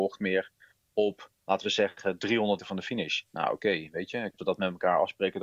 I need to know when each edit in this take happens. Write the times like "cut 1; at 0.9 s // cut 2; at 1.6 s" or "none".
cut 1; at 1.4 s // cut 2; at 2.6 s // cut 3; at 4.4 s

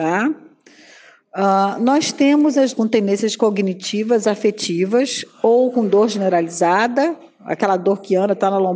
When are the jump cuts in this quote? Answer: cut 1; at 2.7 s

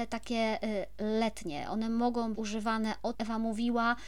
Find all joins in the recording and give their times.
cut 1; at 2.3 s // cut 2; at 3.1 s

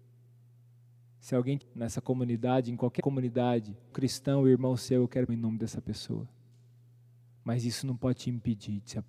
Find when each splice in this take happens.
cut 1; at 1.6 s // cut 2; at 3.0 s // cut 3; at 3.9 s // cut 4; at 5.3 s

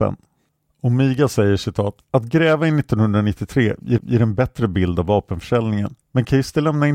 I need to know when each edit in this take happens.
cut 1; at 2.0 s // cut 2; at 4.0 s // cut 3; at 6.0 s

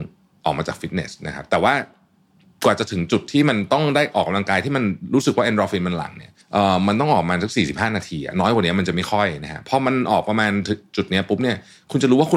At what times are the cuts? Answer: cut 1; at 6.4 s

